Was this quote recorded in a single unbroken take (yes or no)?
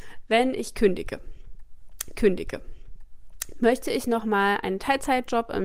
no